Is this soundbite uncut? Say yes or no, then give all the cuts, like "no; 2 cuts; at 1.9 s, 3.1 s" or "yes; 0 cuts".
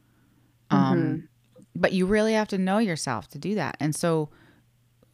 yes; 0 cuts